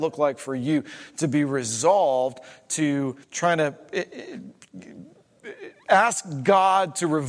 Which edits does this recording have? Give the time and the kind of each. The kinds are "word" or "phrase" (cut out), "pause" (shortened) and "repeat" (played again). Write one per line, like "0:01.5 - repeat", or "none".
0:03.2 - pause